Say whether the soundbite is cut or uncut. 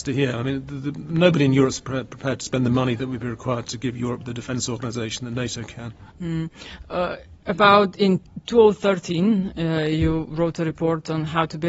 cut